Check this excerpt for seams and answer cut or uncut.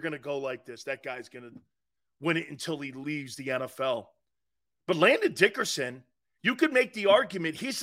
uncut